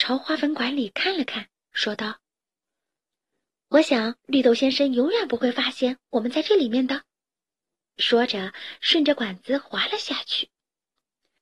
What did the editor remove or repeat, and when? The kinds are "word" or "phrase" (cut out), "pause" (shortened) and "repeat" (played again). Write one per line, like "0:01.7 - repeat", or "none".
none